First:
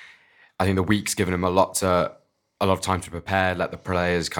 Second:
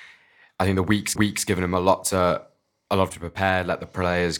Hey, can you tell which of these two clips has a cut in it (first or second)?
second